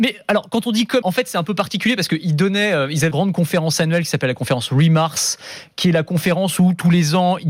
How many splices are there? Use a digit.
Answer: 2